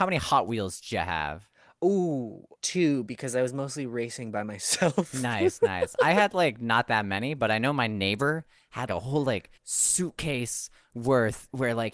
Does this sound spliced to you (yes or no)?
yes